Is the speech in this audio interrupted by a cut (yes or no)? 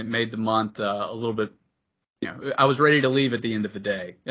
no